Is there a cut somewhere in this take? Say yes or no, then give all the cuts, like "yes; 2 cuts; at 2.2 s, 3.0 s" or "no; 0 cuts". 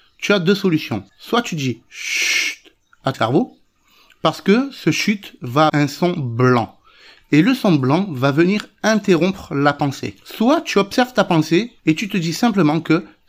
yes; 4 cuts; at 1.1 s, 3.1 s, 5.7 s, 11.8 s